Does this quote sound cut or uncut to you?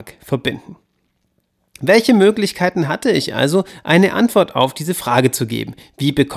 uncut